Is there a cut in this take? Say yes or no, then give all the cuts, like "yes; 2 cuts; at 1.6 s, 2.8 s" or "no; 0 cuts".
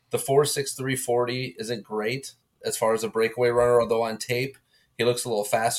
no; 0 cuts